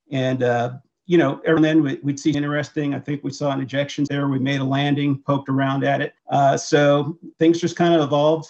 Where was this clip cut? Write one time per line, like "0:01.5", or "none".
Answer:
0:01.6
0:02.3
0:04.1
0:06.2
0:07.3